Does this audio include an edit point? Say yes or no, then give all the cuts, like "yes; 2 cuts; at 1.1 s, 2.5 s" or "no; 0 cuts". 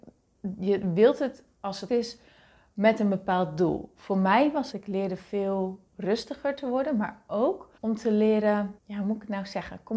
yes; 5 cuts; at 1.9 s, 4.7 s, 5.9 s, 7.8 s, 8.8 s